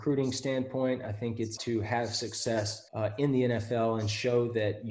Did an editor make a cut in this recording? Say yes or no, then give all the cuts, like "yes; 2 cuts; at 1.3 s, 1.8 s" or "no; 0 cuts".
yes; 2 cuts; at 1.6 s, 2.9 s